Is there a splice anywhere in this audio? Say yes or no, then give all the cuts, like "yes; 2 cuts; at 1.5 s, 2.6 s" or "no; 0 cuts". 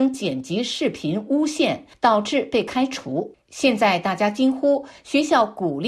yes; 1 cut; at 3.4 s